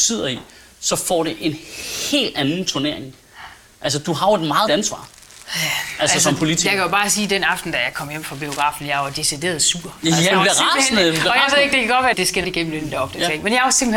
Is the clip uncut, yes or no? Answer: no